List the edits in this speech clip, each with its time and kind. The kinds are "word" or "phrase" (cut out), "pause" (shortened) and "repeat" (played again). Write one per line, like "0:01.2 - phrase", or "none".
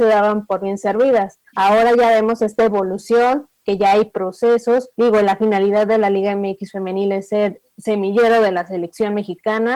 0:01.5 - pause
0:04.9 - pause